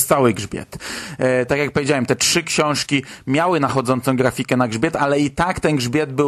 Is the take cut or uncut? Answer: uncut